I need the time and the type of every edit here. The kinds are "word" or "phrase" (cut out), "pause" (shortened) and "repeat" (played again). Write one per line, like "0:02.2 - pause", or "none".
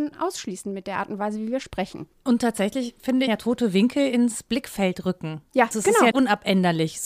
0:02.1 - pause
0:03.3 - phrase
0:05.7 - word
0:06.1 - word